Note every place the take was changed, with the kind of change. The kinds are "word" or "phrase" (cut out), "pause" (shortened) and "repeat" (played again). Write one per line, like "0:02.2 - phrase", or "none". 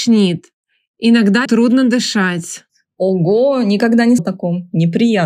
0:01.5 - word
0:02.7 - pause
0:04.2 - word